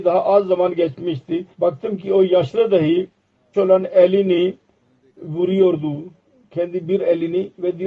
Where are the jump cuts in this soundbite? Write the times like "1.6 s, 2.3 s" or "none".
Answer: 1.5 s, 3.5 s